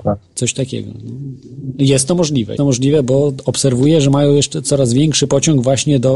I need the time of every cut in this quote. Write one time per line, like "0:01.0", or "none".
0:02.6